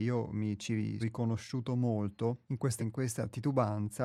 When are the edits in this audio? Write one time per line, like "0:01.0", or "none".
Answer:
0:01.0
0:02.4
0:02.8